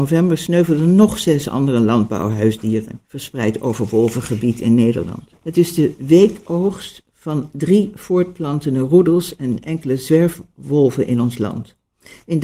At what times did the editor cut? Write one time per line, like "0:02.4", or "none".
0:03.1
0:05.4